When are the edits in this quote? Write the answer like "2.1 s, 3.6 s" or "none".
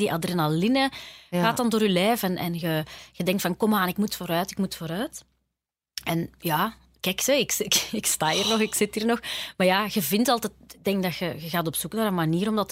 none